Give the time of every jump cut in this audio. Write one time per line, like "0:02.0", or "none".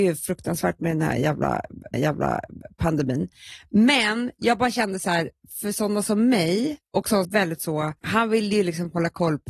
0:01.9
0:07.2
0:08.0